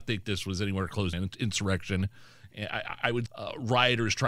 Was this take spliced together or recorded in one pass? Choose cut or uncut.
cut